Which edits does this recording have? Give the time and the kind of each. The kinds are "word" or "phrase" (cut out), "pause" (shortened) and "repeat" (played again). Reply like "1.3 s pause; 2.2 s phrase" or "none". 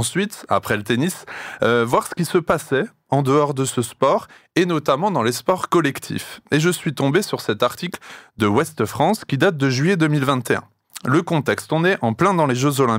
none